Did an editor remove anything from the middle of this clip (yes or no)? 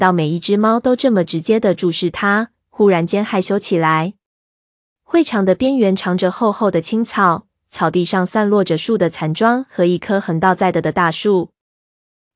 no